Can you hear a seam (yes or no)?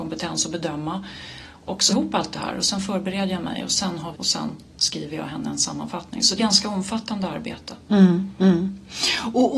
yes